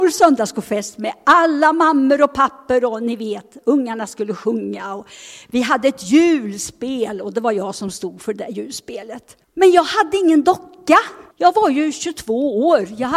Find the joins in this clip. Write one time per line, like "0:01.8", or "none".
0:09.4
0:11.3